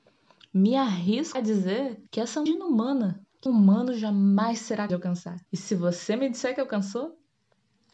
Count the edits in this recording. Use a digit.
6